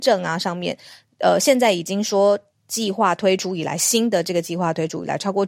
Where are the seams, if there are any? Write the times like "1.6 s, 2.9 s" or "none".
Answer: none